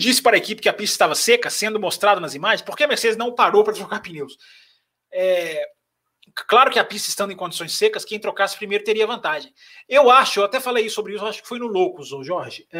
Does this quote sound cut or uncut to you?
uncut